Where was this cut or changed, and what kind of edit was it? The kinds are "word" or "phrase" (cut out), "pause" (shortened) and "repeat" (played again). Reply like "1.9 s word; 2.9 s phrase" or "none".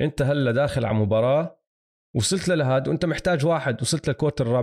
none